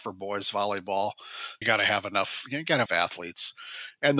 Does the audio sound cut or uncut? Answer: cut